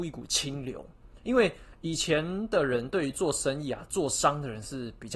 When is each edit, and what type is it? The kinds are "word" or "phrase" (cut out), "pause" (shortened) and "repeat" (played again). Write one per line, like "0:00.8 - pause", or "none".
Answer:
none